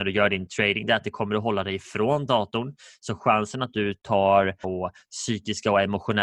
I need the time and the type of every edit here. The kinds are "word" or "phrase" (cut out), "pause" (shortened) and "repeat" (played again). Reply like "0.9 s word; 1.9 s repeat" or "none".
4.6 s word